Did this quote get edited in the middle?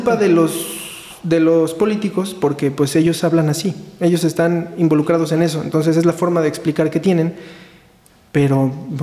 no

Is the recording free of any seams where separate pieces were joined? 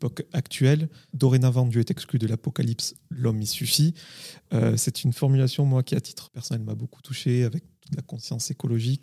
no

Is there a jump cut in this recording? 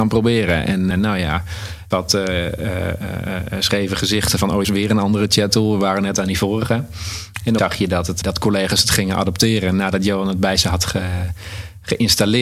yes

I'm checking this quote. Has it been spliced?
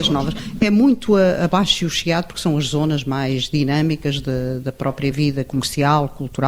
no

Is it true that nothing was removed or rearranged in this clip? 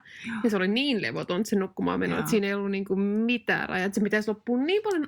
yes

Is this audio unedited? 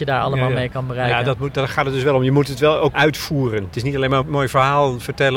no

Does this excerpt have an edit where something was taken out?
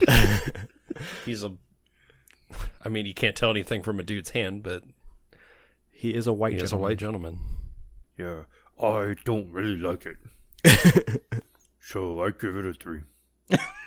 no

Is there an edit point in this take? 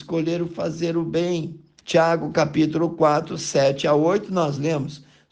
yes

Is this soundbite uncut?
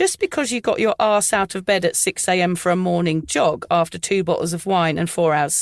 yes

